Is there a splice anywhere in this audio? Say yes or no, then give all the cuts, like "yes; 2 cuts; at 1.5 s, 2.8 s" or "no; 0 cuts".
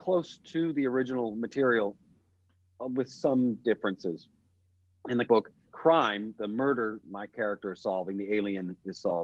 yes; 3 cuts; at 5.3 s, 5.7 s, 7.0 s